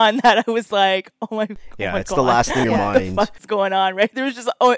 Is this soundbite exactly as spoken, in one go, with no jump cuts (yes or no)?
no